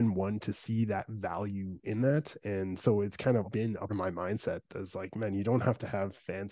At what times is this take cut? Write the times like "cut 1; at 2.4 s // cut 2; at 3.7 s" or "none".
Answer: cut 1; at 3.4 s // cut 2; at 3.9 s